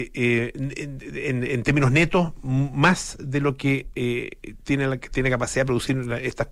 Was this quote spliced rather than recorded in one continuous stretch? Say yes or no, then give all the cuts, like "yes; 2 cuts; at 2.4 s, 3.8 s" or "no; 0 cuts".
no; 0 cuts